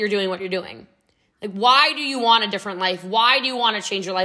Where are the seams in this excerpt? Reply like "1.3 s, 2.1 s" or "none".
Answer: none